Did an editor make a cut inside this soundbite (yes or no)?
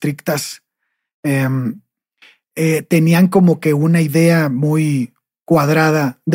no